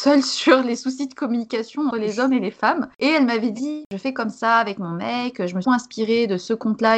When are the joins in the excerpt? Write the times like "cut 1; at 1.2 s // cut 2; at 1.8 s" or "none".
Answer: cut 1; at 1.9 s // cut 2; at 5.6 s